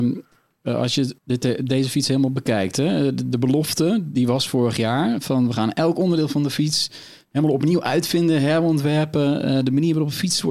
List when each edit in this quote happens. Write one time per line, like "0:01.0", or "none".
0:01.2